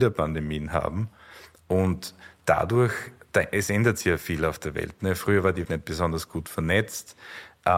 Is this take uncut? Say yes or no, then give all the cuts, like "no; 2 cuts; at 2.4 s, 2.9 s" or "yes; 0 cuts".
no; 1 cut; at 5.6 s